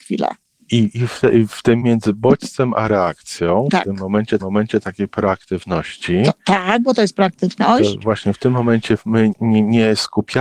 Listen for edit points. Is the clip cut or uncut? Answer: cut